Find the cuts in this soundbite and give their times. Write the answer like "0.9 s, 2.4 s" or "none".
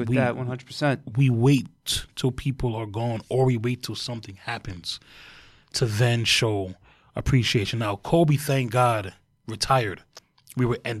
none